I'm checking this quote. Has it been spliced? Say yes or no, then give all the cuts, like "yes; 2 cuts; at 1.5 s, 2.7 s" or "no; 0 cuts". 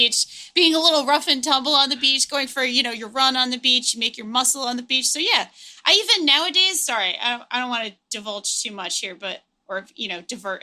no; 0 cuts